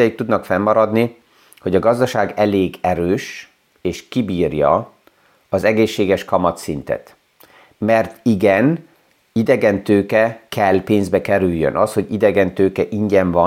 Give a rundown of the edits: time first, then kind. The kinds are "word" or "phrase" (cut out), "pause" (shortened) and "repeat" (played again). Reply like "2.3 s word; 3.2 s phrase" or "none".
none